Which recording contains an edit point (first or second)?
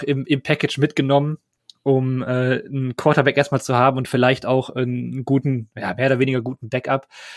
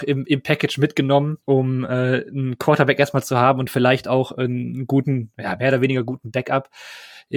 second